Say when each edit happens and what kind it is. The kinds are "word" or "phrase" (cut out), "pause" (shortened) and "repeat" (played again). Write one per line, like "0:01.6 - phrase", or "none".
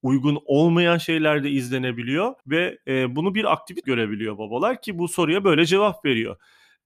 0:02.4 - pause
0:03.8 - word